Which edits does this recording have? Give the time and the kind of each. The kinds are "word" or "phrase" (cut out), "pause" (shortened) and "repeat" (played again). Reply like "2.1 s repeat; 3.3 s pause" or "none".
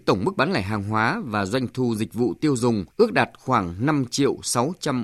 2.9 s pause